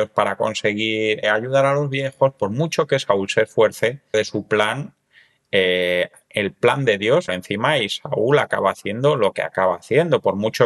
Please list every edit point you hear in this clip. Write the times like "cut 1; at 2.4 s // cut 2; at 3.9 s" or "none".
cut 1; at 1.2 s // cut 2; at 4.1 s // cut 3; at 7.3 s